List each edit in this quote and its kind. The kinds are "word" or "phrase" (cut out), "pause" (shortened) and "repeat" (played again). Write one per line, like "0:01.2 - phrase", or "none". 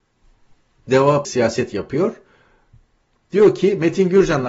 0:01.2 - word